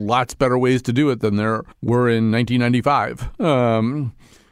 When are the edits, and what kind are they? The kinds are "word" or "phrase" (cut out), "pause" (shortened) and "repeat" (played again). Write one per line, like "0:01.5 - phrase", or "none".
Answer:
0:01.7 - pause